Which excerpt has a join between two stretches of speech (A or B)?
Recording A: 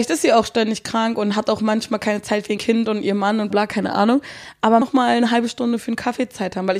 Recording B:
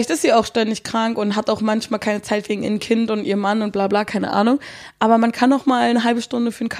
A